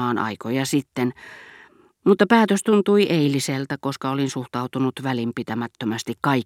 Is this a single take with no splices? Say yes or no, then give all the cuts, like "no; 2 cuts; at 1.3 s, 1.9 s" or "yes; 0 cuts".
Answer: yes; 0 cuts